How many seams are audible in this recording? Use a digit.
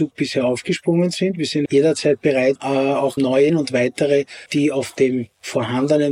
5